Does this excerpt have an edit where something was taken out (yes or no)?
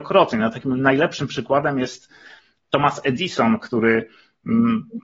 no